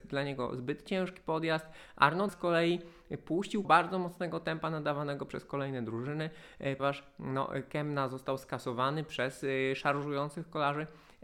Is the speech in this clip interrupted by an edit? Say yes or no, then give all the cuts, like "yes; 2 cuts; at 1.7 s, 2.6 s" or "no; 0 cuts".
yes; 3 cuts; at 2.3 s, 3.6 s, 6.8 s